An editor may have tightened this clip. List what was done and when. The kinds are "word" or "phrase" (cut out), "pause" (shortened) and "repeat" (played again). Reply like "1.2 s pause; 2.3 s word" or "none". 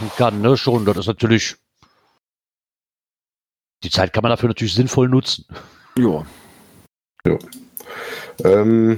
none